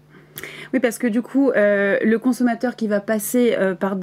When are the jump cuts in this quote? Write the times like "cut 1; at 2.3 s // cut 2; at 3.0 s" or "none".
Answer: none

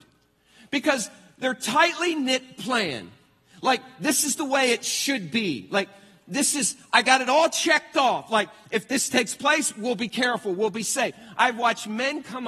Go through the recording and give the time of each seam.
none

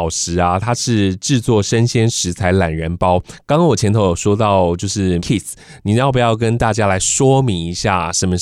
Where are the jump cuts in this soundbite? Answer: cut 1; at 5.2 s

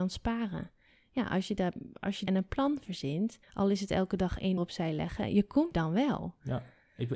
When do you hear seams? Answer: cut 1; at 2.3 s // cut 2; at 3.4 s // cut 3; at 4.6 s // cut 4; at 5.7 s

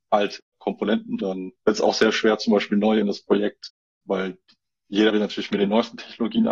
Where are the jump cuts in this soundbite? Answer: cut 1; at 1.2 s // cut 2; at 1.6 s // cut 3; at 3.0 s // cut 4; at 4.0 s // cut 5; at 5.1 s

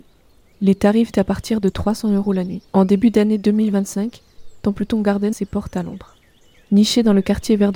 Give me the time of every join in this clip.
cut 1; at 1.1 s // cut 2; at 2.7 s // cut 3; at 5.3 s

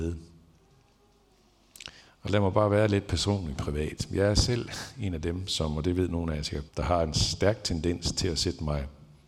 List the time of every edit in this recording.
cut 1; at 2.0 s // cut 2; at 6.7 s

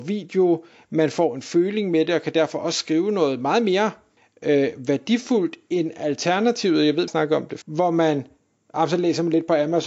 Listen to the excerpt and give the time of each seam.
cut 1; at 4.2 s // cut 2; at 7.1 s // cut 3; at 7.6 s

